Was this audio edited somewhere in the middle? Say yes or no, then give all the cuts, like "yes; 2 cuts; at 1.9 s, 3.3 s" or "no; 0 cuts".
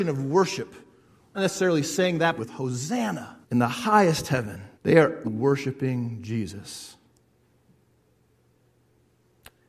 yes; 5 cuts; at 1.3 s, 2.4 s, 3.4 s, 4.7 s, 5.2 s